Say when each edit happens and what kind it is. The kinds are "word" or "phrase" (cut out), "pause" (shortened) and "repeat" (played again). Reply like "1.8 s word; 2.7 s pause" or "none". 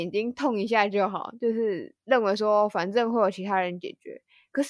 2.0 s pause